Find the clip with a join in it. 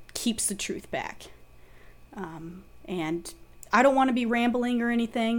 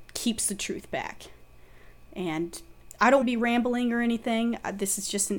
second; 2 cuts; at 2.1 s, 3.2 s

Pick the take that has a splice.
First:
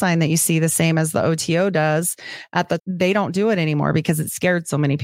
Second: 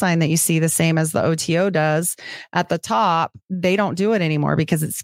first; 1 cut; at 2.8 s

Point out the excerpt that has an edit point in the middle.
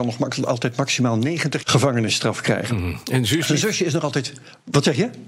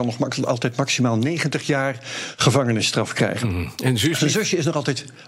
first; 1 cut; at 1.6 s

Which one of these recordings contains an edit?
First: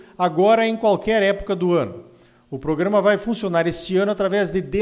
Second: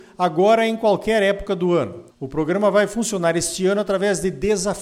second; 1 cut; at 2.1 s

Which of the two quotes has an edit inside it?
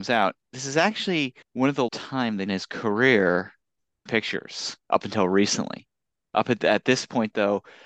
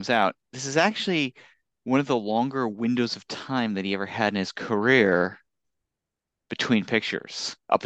first; 4 cuts; at 1.4 s, 1.9 s, 2.5 s, 4.1 s

